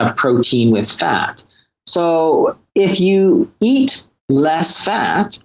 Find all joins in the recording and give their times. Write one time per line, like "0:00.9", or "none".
0:02.7
0:04.2